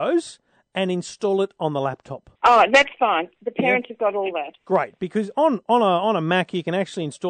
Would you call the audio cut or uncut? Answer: cut